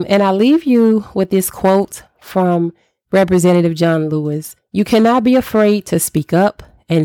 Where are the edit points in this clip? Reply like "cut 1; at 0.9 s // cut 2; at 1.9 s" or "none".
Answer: none